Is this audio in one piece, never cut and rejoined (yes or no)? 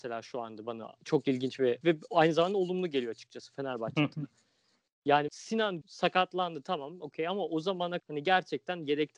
no